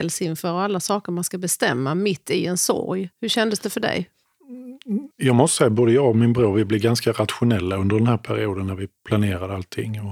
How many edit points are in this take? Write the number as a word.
three